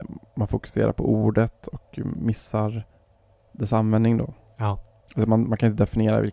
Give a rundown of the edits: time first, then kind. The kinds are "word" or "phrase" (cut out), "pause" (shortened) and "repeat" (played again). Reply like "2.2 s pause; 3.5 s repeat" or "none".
none